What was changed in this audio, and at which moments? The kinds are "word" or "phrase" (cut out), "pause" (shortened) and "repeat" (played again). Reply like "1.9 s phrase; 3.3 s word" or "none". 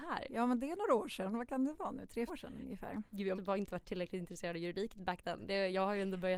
2.3 s word; 3.4 s word

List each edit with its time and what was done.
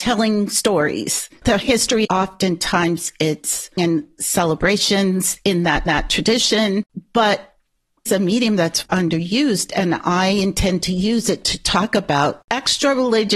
2.0 s phrase; 3.8 s phrase; 5.9 s repeat; 8.1 s phrase; 8.9 s word

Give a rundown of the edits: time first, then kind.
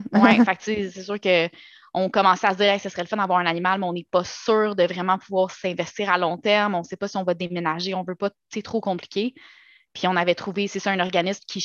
none

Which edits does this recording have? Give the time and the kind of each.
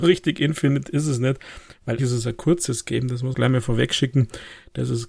2.0 s word; 3.3 s word

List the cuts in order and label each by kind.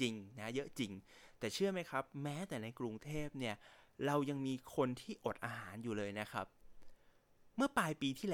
none

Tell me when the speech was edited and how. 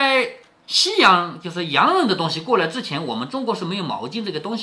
none

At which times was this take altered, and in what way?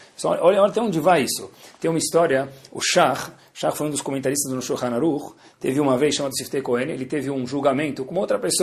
none

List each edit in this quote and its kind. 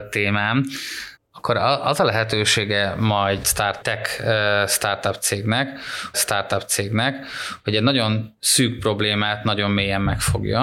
1.2 s pause; 3.4 s word; 3.8 s word; 6.1 s repeat

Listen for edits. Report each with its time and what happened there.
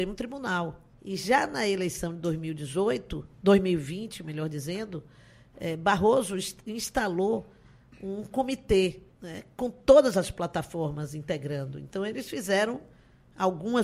0.9 s pause; 9.1 s pause

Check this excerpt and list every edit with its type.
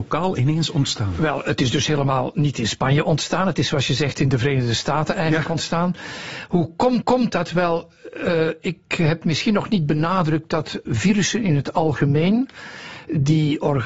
7.0 s repeat; 10.8 s word

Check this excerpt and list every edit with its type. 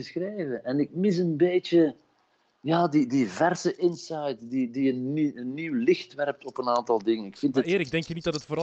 none

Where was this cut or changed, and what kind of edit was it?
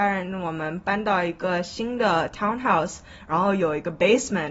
none

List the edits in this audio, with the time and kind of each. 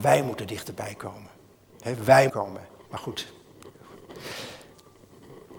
2.3 s phrase; 2.8 s pause

